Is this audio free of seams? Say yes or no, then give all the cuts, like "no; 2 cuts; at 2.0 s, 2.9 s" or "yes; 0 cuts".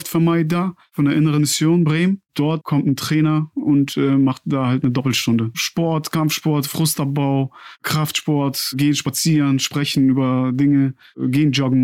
yes; 0 cuts